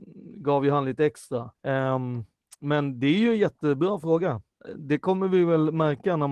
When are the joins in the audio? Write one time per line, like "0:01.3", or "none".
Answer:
0:01.5